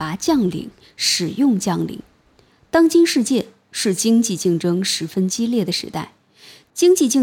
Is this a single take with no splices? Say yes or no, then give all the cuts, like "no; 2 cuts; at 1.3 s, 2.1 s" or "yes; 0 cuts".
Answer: yes; 0 cuts